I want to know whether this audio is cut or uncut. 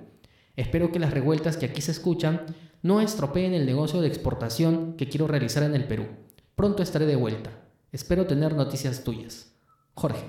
uncut